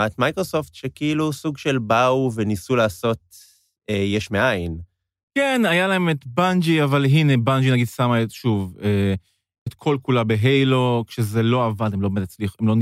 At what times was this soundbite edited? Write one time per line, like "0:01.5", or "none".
0:09.7